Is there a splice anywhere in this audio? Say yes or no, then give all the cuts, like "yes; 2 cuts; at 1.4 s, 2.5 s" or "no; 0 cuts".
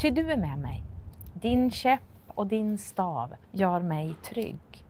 yes; 1 cut; at 3.4 s